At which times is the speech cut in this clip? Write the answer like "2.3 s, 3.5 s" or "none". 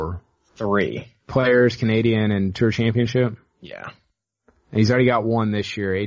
none